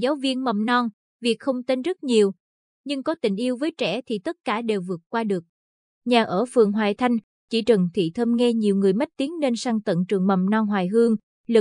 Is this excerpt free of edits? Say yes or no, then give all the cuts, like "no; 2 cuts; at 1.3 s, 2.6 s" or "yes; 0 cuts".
yes; 0 cuts